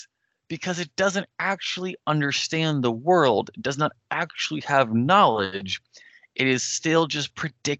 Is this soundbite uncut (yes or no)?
yes